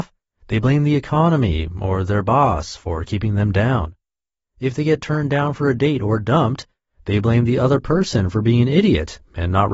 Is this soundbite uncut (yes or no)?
yes